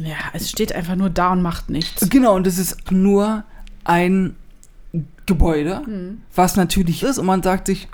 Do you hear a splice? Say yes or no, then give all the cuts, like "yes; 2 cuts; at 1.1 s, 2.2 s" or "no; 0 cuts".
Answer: yes; 3 cuts; at 2.9 s, 6.2 s, 7.0 s